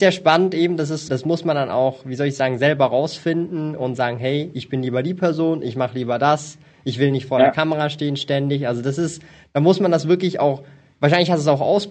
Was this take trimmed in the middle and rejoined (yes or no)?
yes